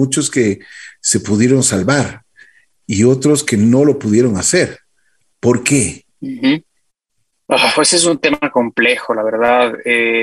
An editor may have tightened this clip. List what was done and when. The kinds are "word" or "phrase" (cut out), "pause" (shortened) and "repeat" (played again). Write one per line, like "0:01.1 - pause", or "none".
none